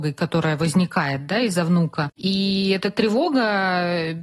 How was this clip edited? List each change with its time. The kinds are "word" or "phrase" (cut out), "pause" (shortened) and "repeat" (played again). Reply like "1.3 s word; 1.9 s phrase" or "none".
2.1 s pause